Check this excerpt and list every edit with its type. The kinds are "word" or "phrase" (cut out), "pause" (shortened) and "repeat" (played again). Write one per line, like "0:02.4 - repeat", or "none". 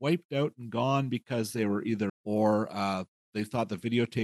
0:02.1 - word